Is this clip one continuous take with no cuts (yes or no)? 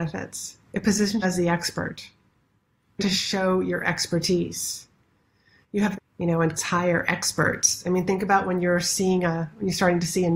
no